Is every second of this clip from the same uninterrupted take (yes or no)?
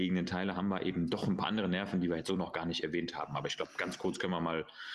yes